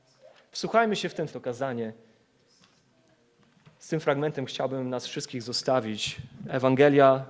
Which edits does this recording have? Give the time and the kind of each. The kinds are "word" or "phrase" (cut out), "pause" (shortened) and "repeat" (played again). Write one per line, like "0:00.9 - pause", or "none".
0:01.3 - phrase

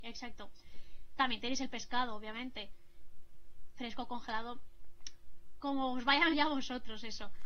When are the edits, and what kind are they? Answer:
0:06.3 - word

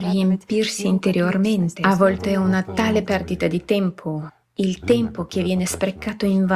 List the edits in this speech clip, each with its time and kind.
none

